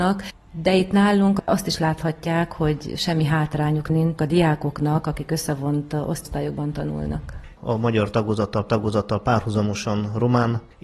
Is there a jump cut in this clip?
yes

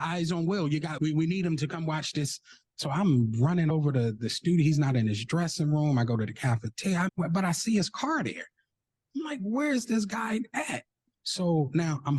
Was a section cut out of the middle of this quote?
yes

